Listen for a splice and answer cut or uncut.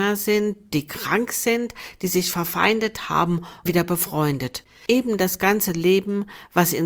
cut